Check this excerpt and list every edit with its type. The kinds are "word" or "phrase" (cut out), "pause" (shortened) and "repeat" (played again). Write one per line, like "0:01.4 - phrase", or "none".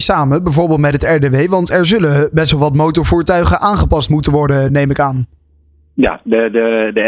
none